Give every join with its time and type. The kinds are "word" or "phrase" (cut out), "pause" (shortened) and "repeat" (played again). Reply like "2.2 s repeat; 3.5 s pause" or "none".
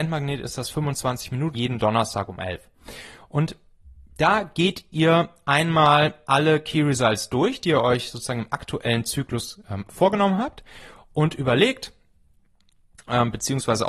1.5 s word